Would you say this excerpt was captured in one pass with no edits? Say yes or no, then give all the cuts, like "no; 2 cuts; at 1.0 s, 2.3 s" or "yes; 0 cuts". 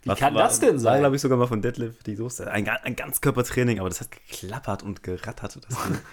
yes; 0 cuts